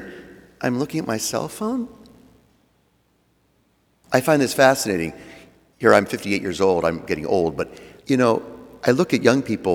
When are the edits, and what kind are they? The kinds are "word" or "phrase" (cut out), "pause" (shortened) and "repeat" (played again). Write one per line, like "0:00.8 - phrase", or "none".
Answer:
0:08.0 - pause